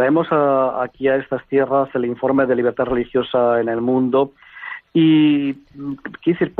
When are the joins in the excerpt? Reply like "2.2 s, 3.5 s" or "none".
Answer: none

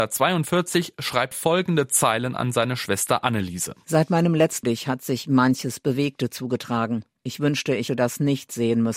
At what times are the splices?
1.3 s, 4.6 s, 7.9 s

